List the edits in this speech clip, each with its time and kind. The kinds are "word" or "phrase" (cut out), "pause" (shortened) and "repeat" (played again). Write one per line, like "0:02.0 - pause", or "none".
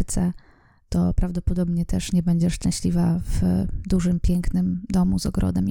none